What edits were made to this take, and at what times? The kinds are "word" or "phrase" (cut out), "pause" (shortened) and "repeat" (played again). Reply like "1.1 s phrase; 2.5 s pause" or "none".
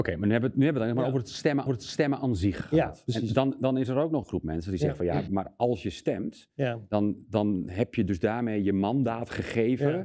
1.7 s repeat; 4.2 s phrase; 5.3 s word